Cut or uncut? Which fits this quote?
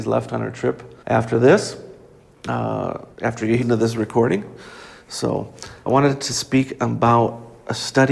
cut